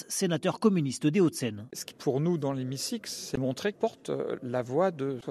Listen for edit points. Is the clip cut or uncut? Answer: cut